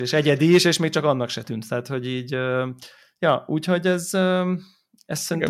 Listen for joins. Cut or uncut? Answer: uncut